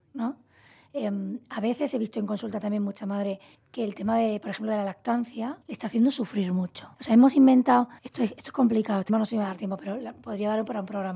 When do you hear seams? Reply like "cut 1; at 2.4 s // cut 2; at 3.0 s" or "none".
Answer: cut 1; at 3.5 s // cut 2; at 5.6 s // cut 3; at 6.9 s // cut 4; at 8.0 s // cut 5; at 9.1 s

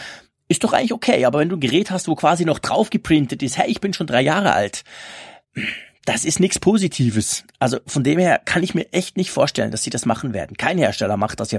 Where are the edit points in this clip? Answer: none

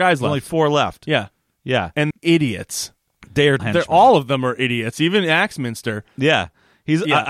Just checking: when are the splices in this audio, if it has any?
cut 1; at 2.1 s // cut 2; at 3.6 s

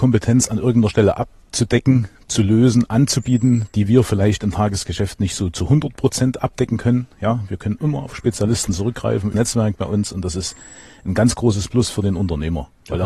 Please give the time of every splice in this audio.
cut 1; at 9.3 s

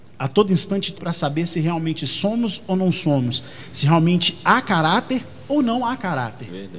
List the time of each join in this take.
cut 1; at 1.0 s

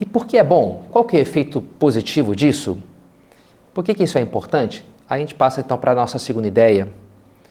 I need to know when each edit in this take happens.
none

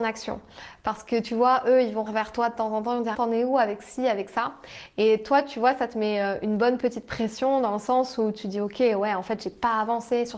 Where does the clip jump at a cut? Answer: cut 1; at 2.1 s // cut 2; at 3.1 s

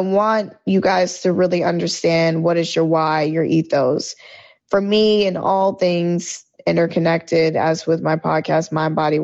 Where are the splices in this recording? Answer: none

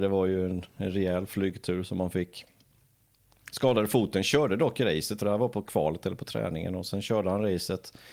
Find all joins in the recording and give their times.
cut 1; at 5.2 s

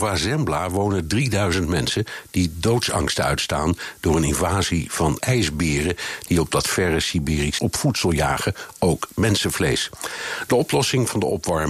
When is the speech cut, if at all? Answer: cut 1; at 5.2 s // cut 2; at 7.6 s

